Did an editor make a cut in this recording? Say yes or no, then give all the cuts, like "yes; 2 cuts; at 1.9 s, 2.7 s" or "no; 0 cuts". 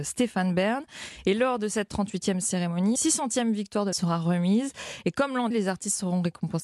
yes; 3 cuts; at 3.0 s, 3.9 s, 5.5 s